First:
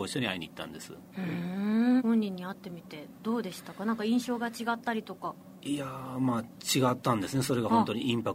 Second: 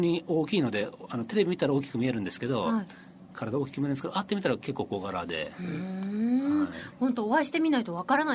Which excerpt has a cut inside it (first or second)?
first